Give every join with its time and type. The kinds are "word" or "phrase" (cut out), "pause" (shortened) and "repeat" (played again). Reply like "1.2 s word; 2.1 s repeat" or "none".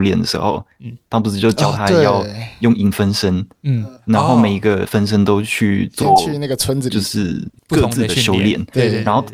none